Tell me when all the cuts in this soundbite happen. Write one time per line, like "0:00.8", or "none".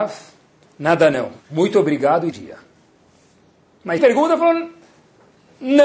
0:01.4
0:02.3
0:04.0